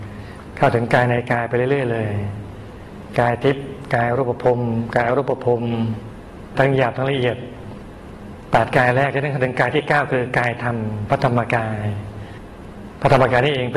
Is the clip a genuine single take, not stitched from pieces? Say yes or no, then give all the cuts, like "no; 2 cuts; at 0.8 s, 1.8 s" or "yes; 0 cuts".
yes; 0 cuts